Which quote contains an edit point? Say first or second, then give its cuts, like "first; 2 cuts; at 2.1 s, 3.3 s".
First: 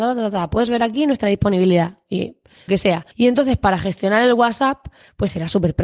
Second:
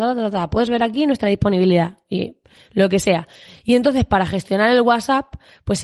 first; 2 cuts; at 2.7 s, 3.1 s